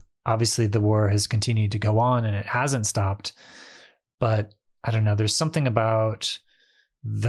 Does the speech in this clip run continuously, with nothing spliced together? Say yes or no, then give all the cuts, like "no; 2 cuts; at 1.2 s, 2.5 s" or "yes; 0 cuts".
yes; 0 cuts